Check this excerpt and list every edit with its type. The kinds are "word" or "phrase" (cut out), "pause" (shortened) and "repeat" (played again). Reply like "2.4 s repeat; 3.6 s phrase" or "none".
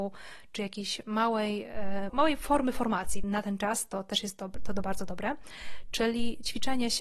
2.1 s word; 3.2 s phrase